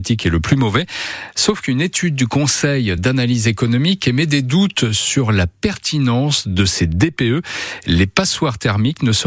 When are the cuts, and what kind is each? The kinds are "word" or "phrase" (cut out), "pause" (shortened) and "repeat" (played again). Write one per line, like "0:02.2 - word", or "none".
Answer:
none